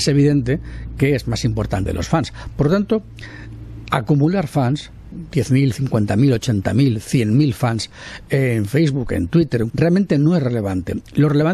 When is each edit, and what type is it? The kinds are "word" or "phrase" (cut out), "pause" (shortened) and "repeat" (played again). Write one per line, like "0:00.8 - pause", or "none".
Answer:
0:01.9 - phrase
0:05.1 - phrase
0:09.7 - phrase